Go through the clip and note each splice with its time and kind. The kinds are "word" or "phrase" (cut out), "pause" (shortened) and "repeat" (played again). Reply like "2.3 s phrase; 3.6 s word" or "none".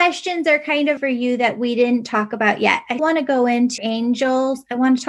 1.0 s word; 3.0 s word; 3.8 s word

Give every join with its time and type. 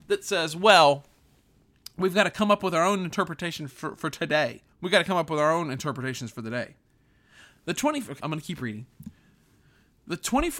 4.7 s pause; 8.2 s word

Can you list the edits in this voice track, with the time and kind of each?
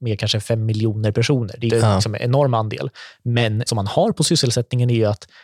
1.7 s word; 3.7 s word

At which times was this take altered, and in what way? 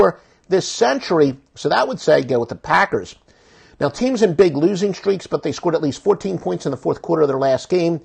none

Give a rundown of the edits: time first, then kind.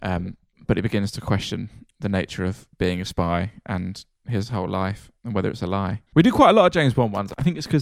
2.7 s pause; 6.1 s pause

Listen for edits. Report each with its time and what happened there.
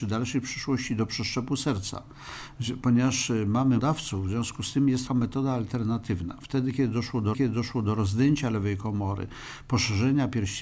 3.8 s word; 5.1 s phrase; 7.3 s repeat

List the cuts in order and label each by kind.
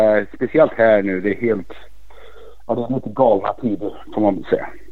none

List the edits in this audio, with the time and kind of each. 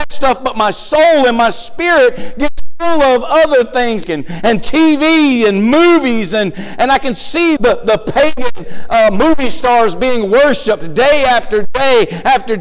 4.0 s phrase; 7.6 s word

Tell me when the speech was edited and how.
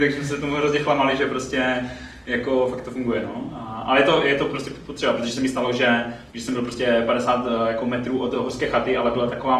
6.3 s pause

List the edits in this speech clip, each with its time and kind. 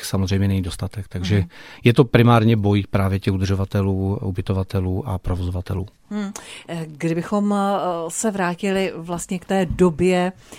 none

